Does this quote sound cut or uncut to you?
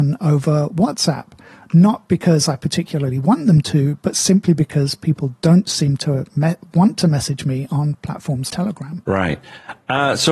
cut